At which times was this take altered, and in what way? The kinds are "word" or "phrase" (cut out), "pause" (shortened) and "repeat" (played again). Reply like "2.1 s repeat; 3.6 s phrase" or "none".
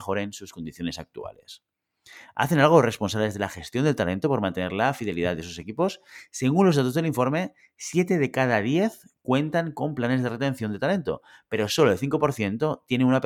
none